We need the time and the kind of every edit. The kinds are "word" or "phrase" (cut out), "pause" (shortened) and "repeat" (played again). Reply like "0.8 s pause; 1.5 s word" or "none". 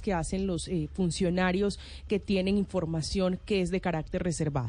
none